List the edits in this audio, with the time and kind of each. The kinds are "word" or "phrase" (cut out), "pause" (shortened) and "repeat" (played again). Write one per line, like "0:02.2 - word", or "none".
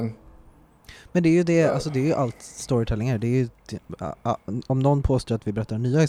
none